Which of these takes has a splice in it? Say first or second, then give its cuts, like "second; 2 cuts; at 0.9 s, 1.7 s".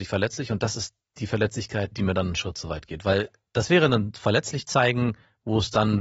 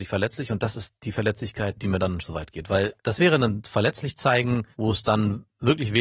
second; 4 cuts; at 1.0 s, 2.2 s, 3.0 s, 4.7 s